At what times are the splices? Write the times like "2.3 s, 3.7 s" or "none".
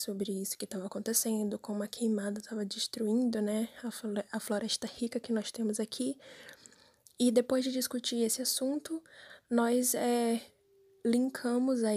none